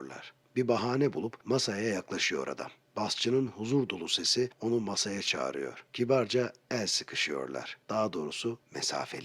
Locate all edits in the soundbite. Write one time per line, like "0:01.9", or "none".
none

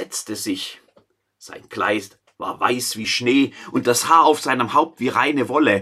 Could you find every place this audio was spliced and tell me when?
none

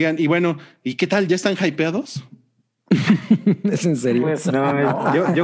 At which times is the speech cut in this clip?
none

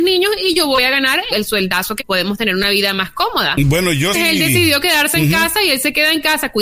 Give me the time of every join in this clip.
0:01.3
0:02.0
0:04.1

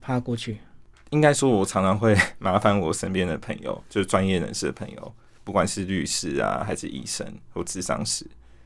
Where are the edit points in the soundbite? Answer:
none

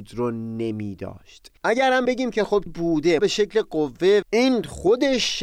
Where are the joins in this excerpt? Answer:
0:01.6
0:02.1
0:02.7
0:03.2
0:04.2

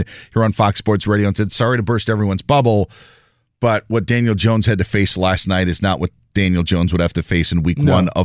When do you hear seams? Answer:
none

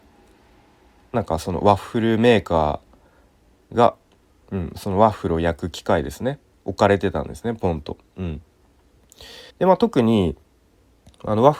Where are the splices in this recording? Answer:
0:09.5

